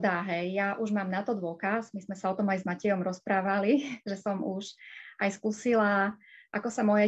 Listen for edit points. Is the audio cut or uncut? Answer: uncut